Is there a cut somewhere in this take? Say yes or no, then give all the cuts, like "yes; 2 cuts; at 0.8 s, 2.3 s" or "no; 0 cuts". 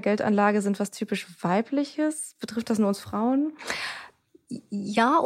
no; 0 cuts